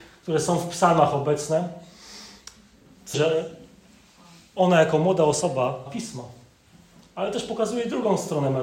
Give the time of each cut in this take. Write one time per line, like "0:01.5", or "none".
0:03.1
0:05.9

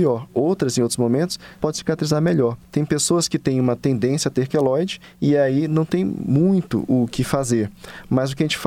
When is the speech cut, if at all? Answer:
none

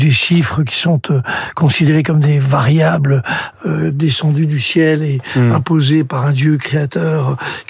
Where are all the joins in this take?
none

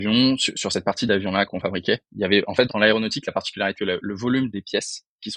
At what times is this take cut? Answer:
0:01.5
0:02.7
0:03.7

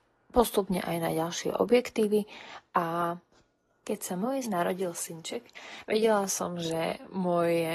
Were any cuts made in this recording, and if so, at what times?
0:04.4

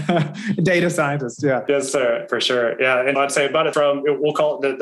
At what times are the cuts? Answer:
0:03.2
0:03.7

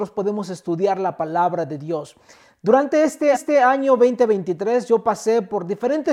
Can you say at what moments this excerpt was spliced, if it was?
0:03.3

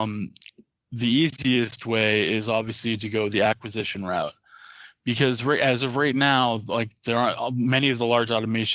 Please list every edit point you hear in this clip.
none

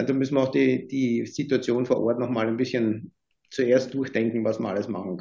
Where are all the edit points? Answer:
none

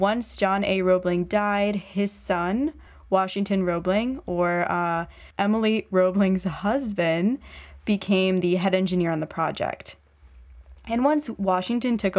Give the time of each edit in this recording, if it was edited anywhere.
none

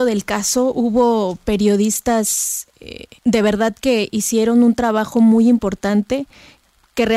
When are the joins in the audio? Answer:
0:03.2

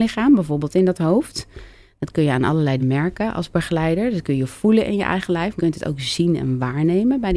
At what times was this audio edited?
0:02.8
0:05.6

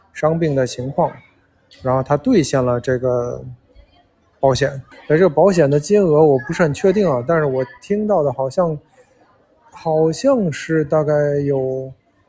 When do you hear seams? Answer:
0:04.9

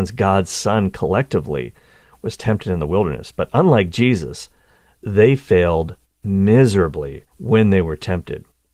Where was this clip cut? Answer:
0:07.3

